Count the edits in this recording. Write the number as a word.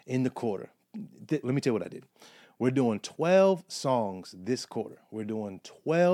one